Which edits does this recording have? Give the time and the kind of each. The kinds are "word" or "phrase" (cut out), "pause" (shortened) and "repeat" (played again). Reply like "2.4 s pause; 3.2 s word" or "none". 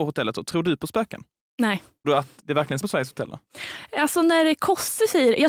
2.0 s word; 2.4 s word; 2.8 s word